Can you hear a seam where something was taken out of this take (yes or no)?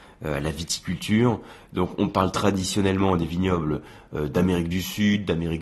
no